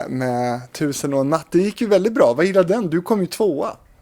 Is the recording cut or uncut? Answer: cut